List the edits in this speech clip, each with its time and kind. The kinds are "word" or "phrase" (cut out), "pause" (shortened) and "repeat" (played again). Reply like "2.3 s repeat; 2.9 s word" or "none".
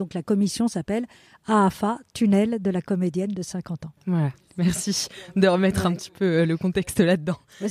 4.0 s pause